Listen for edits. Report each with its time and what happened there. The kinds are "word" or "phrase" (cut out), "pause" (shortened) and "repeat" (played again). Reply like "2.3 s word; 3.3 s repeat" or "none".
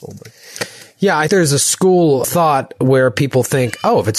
1.3 s word; 2.2 s word